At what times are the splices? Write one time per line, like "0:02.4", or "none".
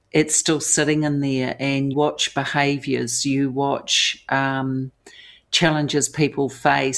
0:01.9